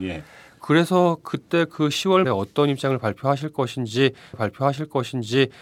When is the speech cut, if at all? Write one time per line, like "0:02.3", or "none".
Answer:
0:02.2
0:04.3